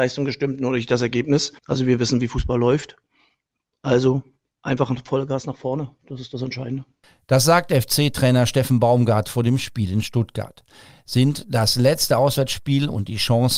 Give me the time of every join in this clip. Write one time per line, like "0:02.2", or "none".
0:01.6